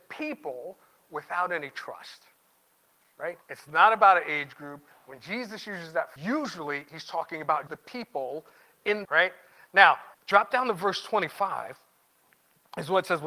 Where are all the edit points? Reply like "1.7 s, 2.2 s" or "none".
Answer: 3.4 s, 6.2 s, 7.7 s, 9.0 s, 10.1 s